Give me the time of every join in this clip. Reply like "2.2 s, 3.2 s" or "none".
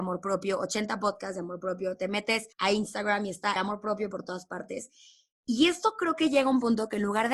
2.5 s, 3.6 s